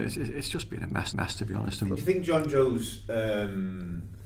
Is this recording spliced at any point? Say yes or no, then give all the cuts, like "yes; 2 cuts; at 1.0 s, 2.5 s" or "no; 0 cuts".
yes; 1 cut; at 1.1 s